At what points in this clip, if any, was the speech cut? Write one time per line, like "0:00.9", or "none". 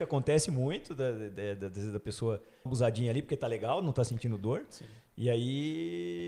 0:02.7